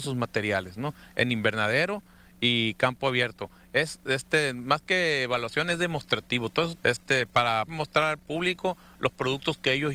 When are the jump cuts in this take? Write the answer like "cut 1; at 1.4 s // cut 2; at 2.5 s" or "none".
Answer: cut 1; at 6.8 s // cut 2; at 7.7 s